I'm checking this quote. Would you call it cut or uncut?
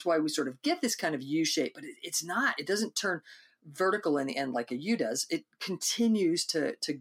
uncut